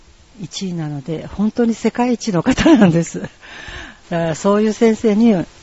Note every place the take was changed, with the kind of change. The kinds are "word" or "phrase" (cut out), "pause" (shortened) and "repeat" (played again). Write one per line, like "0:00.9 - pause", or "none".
0:04.0 - pause